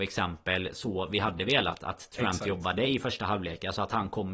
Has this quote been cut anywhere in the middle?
no; 0 cuts

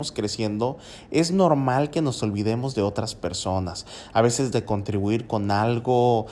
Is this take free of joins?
no; 1 cut; at 4.5 s

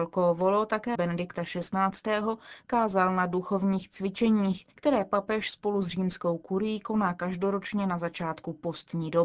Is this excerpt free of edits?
no; 2 cuts; at 0.9 s, 4.7 s

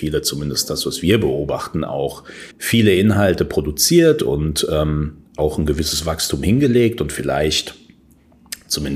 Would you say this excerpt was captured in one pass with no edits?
no; 2 cuts; at 2.5 s, 5.3 s

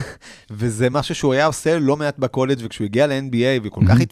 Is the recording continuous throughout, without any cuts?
yes; 0 cuts

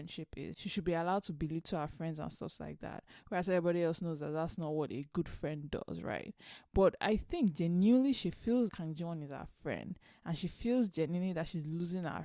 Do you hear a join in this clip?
yes; 1 cut; at 8.7 s

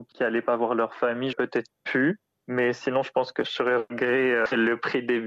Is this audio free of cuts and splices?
no; 1 cut; at 1.3 s

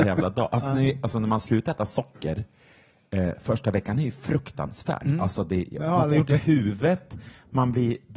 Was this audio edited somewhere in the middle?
no; 0 cuts

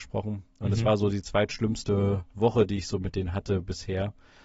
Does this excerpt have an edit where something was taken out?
yes; 1 cut; at 2.3 s

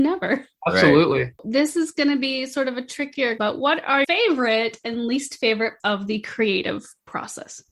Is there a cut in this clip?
yes; 4 cuts; at 1.4 s, 3.4 s, 4.0 s, 5.8 s

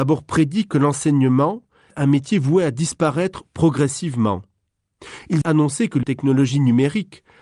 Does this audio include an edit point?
yes; 3 cuts; at 1.9 s, 5.4 s, 6.0 s

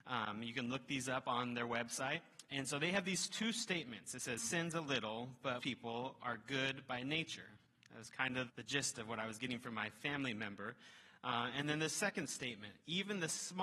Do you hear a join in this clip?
yes; 3 cuts; at 4.4 s, 5.6 s, 8.5 s

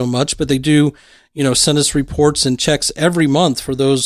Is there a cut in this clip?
no; 0 cuts

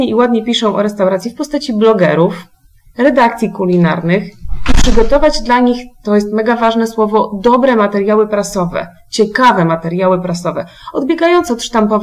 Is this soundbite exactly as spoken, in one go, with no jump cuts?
yes; 0 cuts

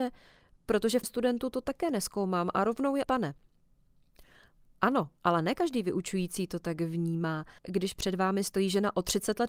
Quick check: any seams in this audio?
yes; 3 cuts; at 1.0 s, 3.0 s, 7.6 s

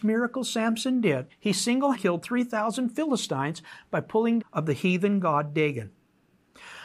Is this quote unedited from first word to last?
no; 3 cuts; at 1.3 s, 1.9 s, 4.4 s

